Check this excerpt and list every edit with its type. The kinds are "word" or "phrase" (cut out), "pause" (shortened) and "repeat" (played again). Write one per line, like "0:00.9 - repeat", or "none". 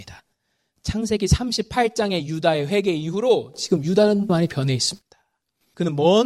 0:04.3 - word